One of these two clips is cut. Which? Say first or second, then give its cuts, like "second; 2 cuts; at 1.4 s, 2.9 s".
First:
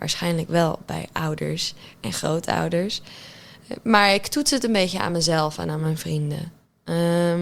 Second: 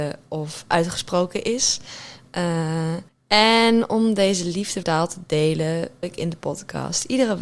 second; 3 cuts; at 3.1 s, 4.8 s, 6.0 s